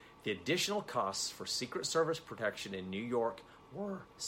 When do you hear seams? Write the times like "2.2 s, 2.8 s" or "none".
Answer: none